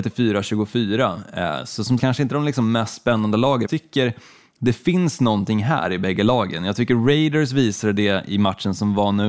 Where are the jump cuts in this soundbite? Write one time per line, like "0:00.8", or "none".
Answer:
0:02.0
0:03.7